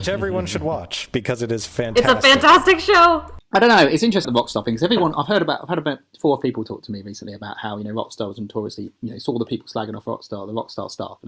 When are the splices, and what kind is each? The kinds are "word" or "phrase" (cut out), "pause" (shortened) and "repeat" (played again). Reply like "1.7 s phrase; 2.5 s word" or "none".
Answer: 4.2 s word; 6.4 s word